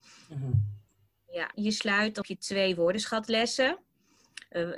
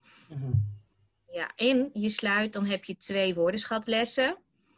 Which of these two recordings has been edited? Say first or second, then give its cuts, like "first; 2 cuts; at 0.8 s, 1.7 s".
first; 2 cuts; at 1.5 s, 2.2 s